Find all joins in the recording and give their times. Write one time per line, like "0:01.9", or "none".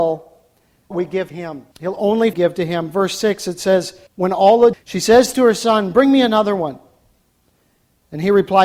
0:00.9
0:01.3
0:01.7
0:02.3
0:04.1
0:04.7